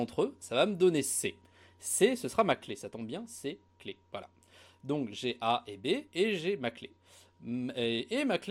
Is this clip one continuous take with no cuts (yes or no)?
yes